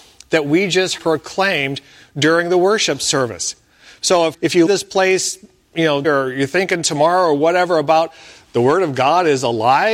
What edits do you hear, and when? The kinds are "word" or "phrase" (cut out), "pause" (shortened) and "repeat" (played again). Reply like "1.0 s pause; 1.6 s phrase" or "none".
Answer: 1.0 s word; 4.3 s word; 4.7 s word; 6.0 s word